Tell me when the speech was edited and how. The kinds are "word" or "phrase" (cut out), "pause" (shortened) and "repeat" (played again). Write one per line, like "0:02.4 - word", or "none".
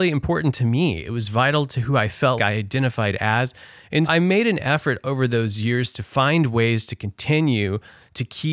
0:02.4 - word
0:04.0 - word